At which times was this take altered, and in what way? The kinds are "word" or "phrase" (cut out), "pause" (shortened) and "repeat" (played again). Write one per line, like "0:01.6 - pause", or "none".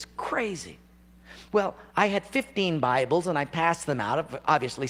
0:01.9 - pause